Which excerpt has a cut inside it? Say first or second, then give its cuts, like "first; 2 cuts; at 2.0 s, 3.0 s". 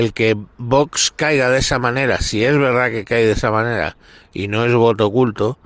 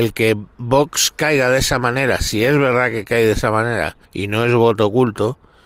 second; 1 cut; at 4.0 s